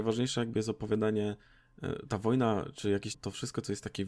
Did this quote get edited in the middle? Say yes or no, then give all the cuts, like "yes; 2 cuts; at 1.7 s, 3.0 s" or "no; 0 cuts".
yes; 1 cut; at 3.1 s